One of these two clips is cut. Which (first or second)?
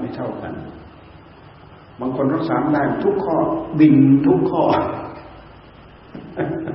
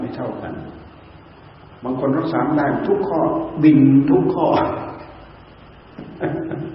second